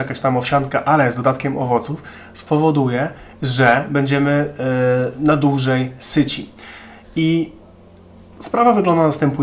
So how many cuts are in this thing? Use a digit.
0